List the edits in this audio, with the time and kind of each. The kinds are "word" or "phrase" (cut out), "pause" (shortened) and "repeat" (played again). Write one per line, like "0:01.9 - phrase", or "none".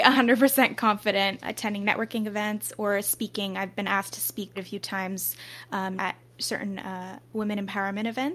0:01.4 - word
0:04.5 - word
0:06.0 - word